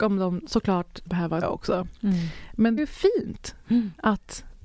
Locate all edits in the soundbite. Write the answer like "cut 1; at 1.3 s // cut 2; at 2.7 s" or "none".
cut 1; at 1.1 s // cut 2; at 1.4 s // cut 3; at 2.8 s